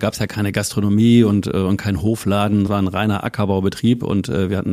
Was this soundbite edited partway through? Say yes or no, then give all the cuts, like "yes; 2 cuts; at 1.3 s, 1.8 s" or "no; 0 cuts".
yes; 1 cut; at 2.7 s